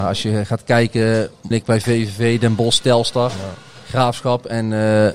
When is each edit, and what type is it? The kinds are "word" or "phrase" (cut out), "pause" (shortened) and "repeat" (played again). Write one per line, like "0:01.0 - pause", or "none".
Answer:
0:01.5 - phrase